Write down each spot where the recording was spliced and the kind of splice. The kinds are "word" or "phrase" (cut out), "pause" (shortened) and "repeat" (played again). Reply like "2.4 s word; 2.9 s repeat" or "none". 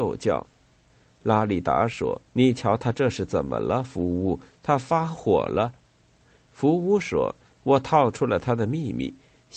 2.3 s pause